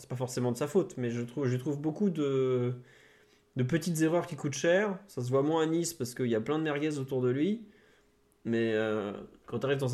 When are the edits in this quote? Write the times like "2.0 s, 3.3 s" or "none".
none